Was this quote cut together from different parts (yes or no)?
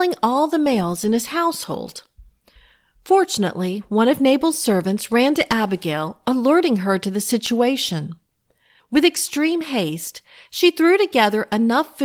no